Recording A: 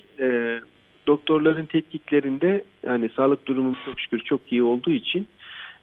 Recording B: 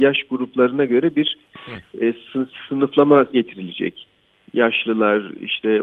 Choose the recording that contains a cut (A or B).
B